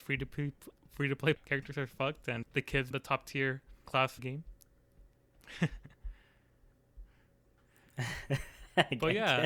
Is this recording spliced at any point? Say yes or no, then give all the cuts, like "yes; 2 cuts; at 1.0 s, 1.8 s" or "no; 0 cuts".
yes; 5 cuts; at 1.3 s, 2.4 s, 2.9 s, 3.9 s, 4.2 s